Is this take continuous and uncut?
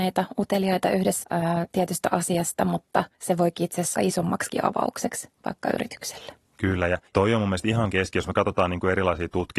no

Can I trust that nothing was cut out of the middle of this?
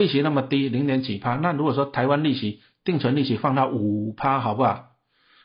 yes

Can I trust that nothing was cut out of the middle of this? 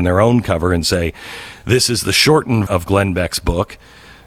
no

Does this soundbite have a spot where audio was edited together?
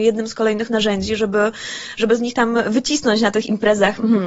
no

